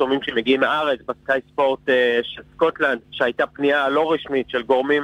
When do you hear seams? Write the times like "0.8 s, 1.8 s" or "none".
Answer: 3.0 s